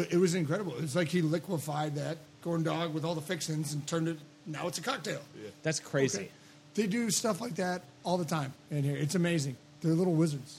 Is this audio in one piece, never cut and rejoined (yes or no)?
yes